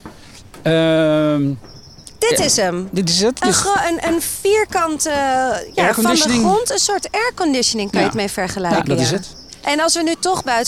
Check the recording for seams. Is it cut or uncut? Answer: uncut